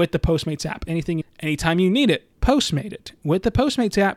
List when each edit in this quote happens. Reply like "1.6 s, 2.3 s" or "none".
1.2 s, 2.3 s